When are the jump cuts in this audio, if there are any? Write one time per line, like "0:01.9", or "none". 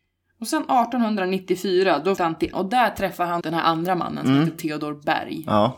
0:02.2
0:02.5
0:03.4